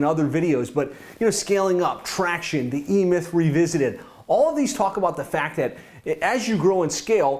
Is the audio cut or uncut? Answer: uncut